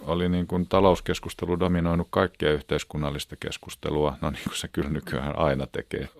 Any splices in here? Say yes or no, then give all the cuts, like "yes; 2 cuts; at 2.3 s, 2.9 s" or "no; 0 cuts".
no; 0 cuts